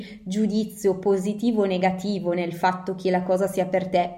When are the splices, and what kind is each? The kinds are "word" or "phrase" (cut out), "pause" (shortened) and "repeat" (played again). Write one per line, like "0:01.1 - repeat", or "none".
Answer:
none